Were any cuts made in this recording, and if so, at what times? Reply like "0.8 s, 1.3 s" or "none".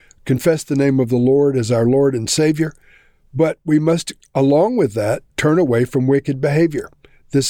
none